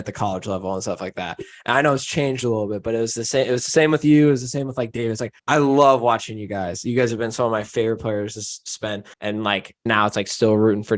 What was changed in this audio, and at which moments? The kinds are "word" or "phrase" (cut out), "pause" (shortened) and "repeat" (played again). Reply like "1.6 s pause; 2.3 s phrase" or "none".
5.4 s pause; 9.1 s pause; 9.9 s word